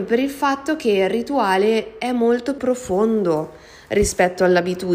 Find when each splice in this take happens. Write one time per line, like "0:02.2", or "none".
0:02.6